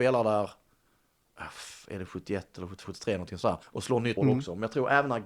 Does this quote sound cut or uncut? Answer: cut